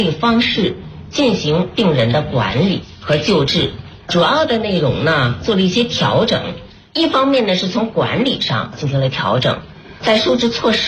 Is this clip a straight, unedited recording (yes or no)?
yes